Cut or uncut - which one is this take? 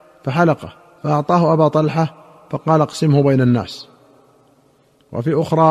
uncut